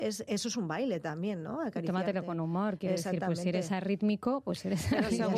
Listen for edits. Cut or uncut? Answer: uncut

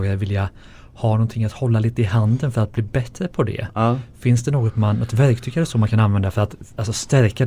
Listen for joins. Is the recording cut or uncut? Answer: uncut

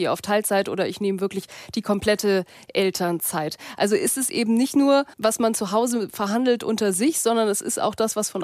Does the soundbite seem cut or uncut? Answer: cut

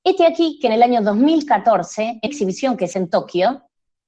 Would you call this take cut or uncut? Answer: cut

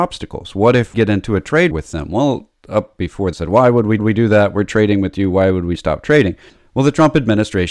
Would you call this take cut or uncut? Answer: cut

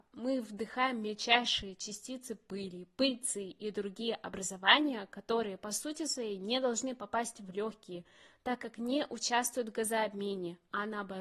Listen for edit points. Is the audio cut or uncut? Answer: uncut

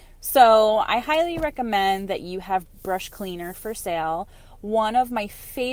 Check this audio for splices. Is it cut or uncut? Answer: uncut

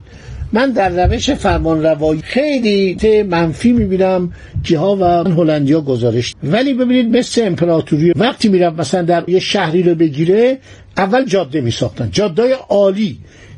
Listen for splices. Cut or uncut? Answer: cut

